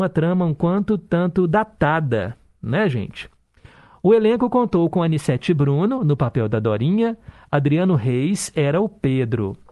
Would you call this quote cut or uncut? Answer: uncut